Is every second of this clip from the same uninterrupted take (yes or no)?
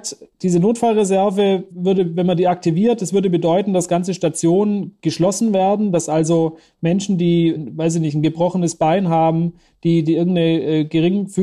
no